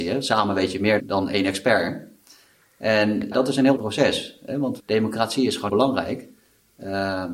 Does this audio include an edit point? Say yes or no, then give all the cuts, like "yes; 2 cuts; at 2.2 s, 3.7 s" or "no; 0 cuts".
yes; 5 cuts; at 1.0 s, 3.3 s, 3.8 s, 4.8 s, 5.7 s